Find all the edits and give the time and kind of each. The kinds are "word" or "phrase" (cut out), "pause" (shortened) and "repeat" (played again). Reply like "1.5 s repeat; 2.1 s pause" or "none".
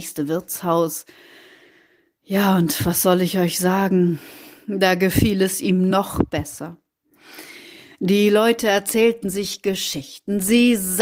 none